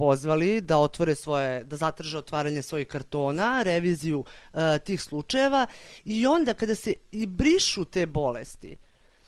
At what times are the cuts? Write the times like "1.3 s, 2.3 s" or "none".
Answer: none